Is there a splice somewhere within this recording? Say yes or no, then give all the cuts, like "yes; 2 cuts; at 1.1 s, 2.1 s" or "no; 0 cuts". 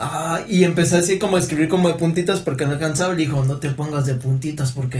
no; 0 cuts